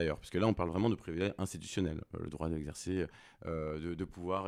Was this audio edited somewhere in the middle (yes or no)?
no